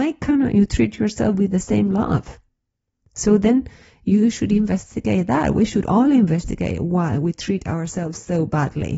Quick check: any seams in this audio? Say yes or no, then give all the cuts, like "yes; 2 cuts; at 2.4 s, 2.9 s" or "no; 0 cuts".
no; 0 cuts